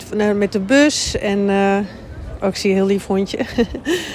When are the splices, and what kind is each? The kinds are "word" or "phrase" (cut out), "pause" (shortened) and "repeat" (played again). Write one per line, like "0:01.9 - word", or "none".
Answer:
none